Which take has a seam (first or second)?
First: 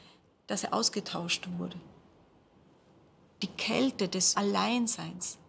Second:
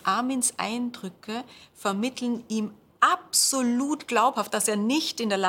first